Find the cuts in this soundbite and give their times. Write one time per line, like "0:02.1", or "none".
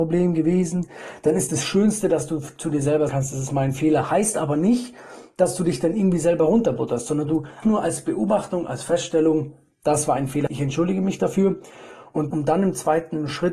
0:01.5
0:03.1
0:07.6
0:10.5
0:12.3

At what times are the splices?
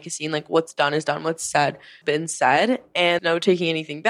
0:02.0
0:03.2

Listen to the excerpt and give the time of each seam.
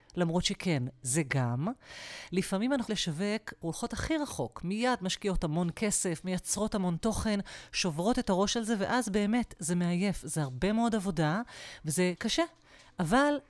0:02.9
0:03.6

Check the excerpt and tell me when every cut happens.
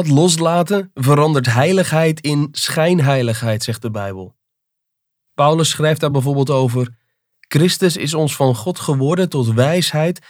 none

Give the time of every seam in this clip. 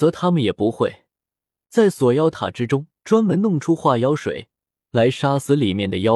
0:03.0

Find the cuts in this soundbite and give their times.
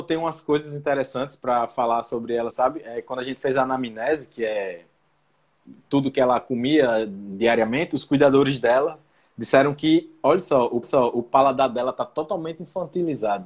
0:02.5
0:09.2
0:10.8

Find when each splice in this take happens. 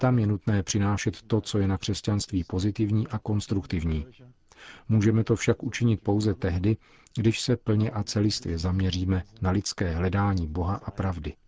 none

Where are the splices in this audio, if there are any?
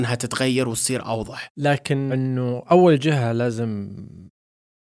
0:02.1

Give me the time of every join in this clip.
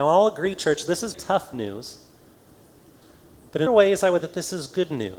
0:01.1
0:03.7
0:04.2

